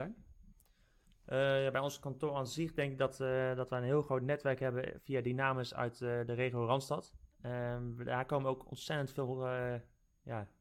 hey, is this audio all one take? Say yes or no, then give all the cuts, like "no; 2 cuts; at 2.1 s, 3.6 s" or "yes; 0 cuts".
no; 1 cut; at 7.3 s